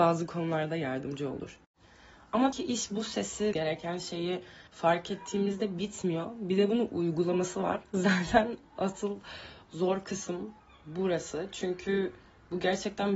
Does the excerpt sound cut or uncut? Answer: cut